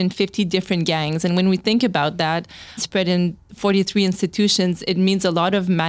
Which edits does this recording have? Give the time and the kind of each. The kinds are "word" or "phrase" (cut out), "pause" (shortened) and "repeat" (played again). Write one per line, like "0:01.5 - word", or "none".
0:02.8 - word